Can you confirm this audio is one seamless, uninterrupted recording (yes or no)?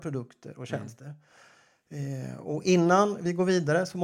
yes